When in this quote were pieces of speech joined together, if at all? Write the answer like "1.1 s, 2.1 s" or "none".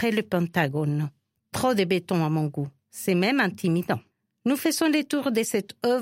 none